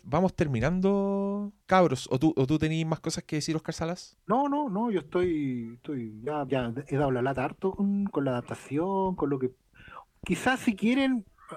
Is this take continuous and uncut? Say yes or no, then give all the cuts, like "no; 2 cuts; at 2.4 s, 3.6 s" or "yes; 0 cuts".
no; 2 cuts; at 1.6 s, 6.5 s